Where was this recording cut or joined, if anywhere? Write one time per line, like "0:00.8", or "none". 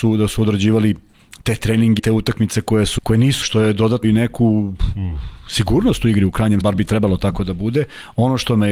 0:02.0
0:03.0
0:03.4
0:04.0
0:06.6